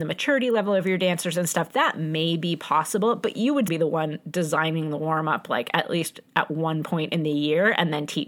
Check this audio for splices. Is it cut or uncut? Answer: cut